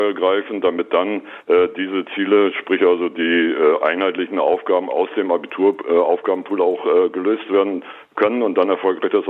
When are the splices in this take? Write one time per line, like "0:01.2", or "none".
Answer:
none